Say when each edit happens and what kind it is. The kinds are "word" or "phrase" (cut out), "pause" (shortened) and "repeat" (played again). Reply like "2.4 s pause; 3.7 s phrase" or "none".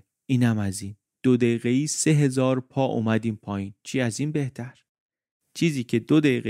3.8 s pause